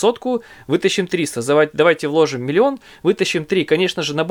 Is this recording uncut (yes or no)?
yes